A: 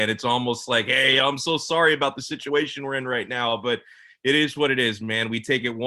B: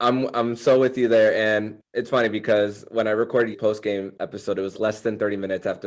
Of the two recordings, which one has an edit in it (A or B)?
B